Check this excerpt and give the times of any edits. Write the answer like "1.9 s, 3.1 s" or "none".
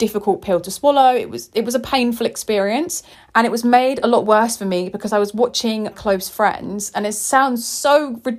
3.1 s, 5.9 s